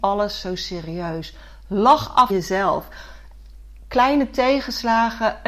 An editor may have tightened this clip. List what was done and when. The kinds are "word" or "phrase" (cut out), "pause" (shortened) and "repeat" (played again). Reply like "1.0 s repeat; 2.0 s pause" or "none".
2.3 s phrase